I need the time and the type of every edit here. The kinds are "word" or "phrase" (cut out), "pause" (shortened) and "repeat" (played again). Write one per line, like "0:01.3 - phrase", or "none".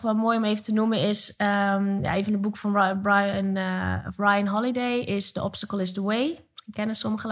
none